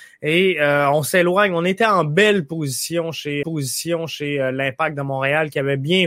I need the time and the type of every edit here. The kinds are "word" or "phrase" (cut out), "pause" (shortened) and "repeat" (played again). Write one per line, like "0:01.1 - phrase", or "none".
0:03.4 - repeat